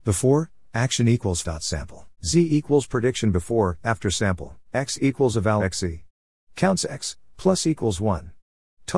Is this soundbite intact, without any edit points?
no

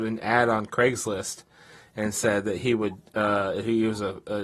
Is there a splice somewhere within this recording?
no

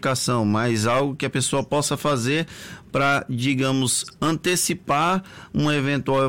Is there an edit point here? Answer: no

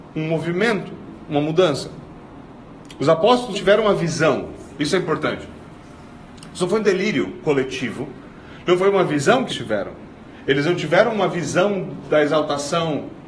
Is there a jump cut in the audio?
yes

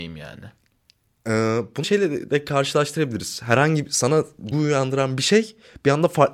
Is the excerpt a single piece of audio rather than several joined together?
no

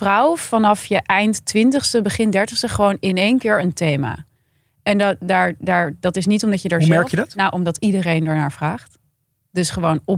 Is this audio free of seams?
yes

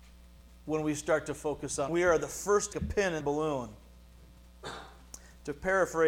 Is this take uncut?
no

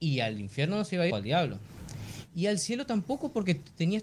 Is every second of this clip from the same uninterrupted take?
no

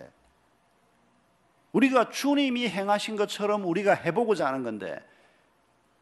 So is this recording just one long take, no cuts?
yes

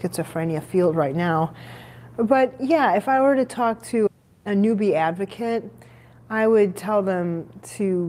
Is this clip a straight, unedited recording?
yes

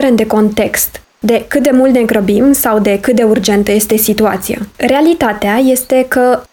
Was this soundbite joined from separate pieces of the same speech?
yes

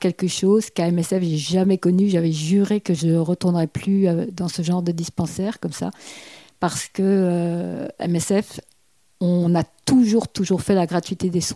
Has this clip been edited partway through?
no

